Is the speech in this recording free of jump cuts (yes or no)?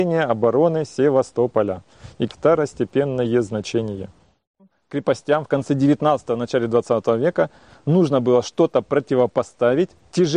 no